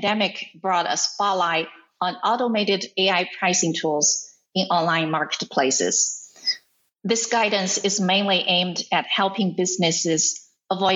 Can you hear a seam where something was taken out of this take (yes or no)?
no